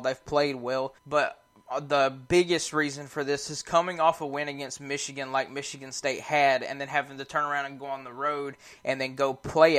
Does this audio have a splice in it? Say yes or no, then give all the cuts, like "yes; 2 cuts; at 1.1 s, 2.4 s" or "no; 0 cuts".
yes; 1 cut; at 1.0 s